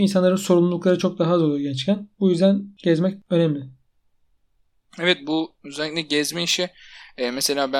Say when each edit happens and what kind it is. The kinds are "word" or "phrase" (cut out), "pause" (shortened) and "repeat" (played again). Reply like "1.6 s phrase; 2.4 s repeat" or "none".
2.1 s pause